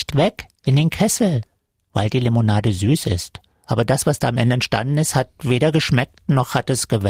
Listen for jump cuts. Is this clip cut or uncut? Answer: uncut